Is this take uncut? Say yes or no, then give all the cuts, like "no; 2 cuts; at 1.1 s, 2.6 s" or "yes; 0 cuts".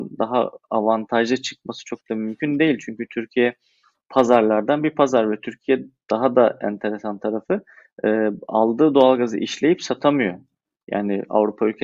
yes; 0 cuts